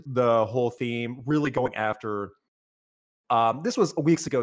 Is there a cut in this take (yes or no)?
no